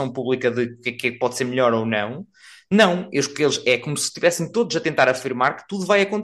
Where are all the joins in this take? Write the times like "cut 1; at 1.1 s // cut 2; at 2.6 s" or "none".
none